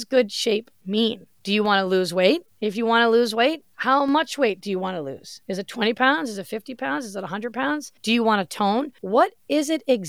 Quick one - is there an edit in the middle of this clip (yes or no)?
yes